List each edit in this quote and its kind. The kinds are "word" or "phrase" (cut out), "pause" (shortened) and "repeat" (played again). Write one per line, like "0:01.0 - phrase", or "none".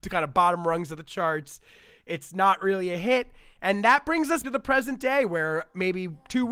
0:04.4 - word